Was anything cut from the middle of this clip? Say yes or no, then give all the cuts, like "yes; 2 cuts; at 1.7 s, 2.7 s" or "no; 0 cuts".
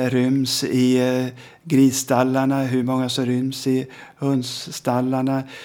no; 0 cuts